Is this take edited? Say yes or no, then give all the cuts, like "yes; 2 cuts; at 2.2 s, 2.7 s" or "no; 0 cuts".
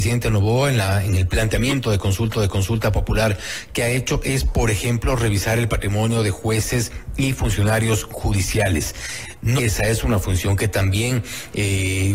yes; 2 cuts; at 2.3 s, 9.6 s